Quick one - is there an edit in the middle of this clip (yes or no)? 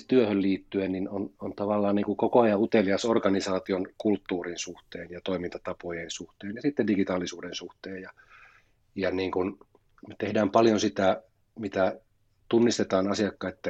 no